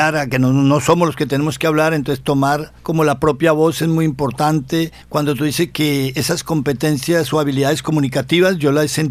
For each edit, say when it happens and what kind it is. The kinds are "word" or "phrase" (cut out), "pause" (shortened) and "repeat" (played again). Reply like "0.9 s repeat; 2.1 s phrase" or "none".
2.8 s pause; 5.0 s pause

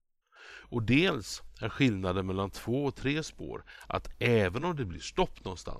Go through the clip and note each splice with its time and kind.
none

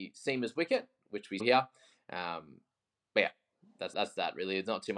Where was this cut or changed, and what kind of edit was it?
1.4 s word; 3.9 s word

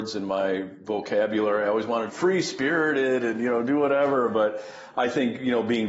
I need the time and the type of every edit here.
2.1 s phrase

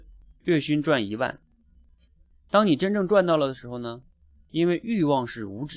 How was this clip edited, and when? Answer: none

